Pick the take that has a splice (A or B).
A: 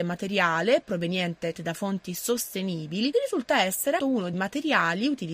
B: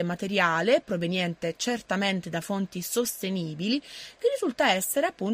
A